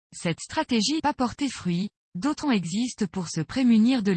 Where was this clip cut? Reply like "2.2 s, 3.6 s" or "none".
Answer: 1.0 s, 1.5 s, 2.4 s